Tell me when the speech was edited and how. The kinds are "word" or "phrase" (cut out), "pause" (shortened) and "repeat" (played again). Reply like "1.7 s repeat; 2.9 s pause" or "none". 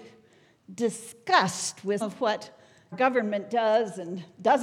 2.0 s word; 2.9 s word